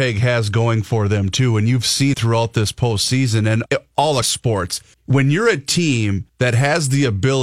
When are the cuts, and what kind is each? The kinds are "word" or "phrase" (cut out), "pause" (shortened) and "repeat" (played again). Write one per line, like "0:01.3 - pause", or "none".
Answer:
0:02.1 - word
0:03.7 - word
0:04.2 - word
0:04.9 - pause
0:06.3 - pause